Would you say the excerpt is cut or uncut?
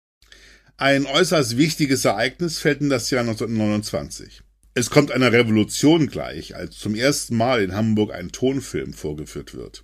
uncut